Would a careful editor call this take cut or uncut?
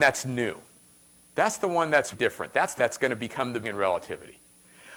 cut